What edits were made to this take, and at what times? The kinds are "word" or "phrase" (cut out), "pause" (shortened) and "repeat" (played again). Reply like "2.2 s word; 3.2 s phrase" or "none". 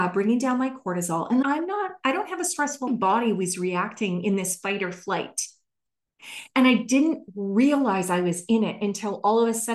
1.4 s word; 2.9 s phrase

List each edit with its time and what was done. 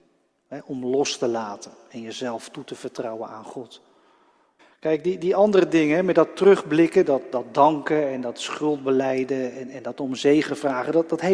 4.6 s pause

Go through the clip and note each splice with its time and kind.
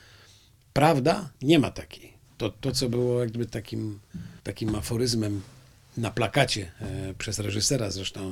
1.4 s pause; 2.6 s word; 4.4 s pause

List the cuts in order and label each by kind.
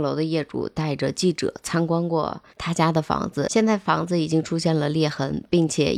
2.5 s pause

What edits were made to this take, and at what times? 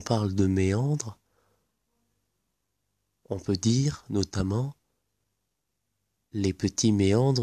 none

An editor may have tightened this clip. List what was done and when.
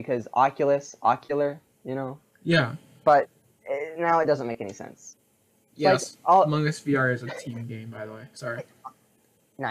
none

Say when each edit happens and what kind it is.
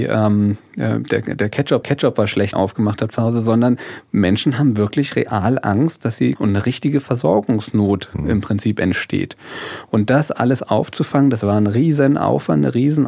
1.8 s repeat; 2.5 s phrase; 6.4 s phrase

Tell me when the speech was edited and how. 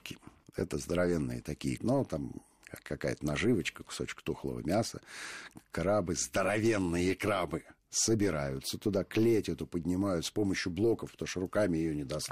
1.8 s phrase

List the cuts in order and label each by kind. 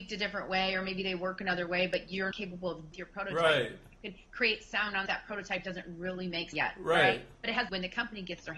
2.3 s word; 2.9 s phrase; 5.1 s phrase; 6.5 s word; 7.7 s phrase

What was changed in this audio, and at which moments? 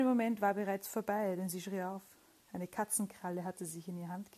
none

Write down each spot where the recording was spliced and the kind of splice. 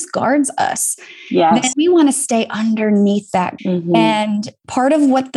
1.7 s word; 3.6 s word

